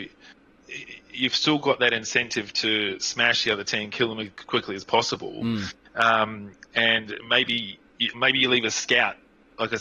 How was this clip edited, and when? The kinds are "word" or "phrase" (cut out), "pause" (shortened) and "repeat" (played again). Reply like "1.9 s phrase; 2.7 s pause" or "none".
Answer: 8.1 s word

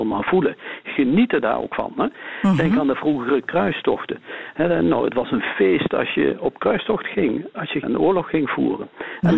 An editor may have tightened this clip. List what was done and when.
7.8 s phrase

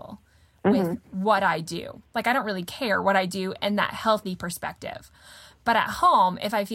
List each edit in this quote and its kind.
none

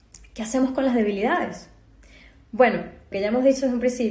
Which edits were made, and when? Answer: 3.1 s word

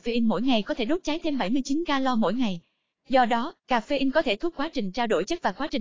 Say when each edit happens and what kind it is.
4.5 s word

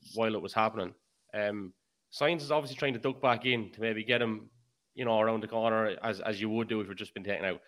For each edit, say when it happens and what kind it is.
none

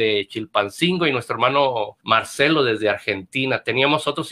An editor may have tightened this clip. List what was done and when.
2.0 s pause

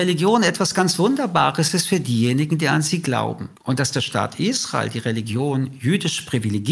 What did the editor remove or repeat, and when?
3.6 s pause

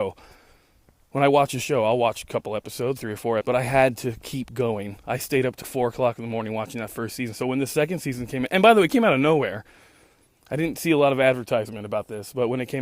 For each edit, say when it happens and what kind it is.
3.0 s word; 3.4 s word; 5.6 s word

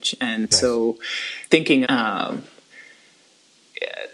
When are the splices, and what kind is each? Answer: 1.9 s word

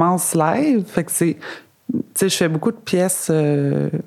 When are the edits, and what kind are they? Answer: none

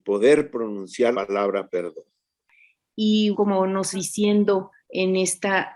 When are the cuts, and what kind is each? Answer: 1.1 s word; 3.3 s word; 3.9 s word; 4.8 s pause

